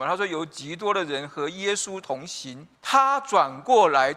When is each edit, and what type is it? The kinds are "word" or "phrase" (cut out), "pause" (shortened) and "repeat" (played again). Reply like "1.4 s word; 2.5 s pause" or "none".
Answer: 2.7 s pause